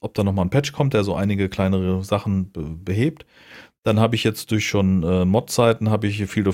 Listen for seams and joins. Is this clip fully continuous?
yes; 0 cuts

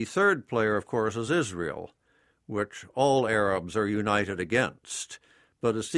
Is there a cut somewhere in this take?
no; 0 cuts

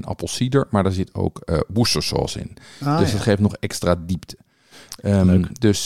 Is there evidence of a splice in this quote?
no; 0 cuts

